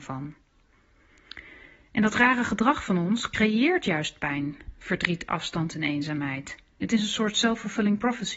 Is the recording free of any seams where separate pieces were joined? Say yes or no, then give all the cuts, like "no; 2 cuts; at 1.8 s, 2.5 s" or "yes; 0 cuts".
yes; 0 cuts